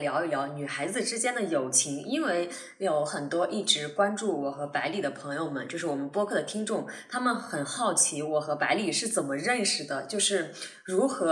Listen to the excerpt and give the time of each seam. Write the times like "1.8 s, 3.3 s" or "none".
none